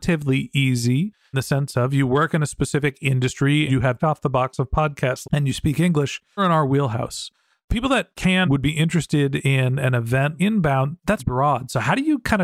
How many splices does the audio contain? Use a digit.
8